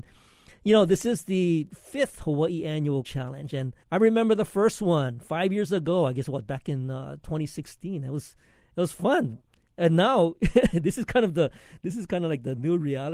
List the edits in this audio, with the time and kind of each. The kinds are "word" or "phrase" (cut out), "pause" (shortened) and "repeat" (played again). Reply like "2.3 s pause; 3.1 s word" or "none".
3.0 s word; 3.8 s pause